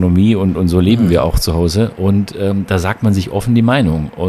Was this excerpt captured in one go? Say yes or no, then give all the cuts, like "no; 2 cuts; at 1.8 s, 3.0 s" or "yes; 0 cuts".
yes; 0 cuts